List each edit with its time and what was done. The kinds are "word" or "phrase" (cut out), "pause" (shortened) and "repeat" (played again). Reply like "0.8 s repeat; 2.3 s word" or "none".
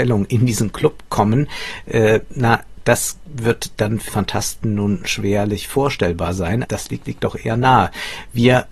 4.1 s word; 6.6 s word; 7.0 s repeat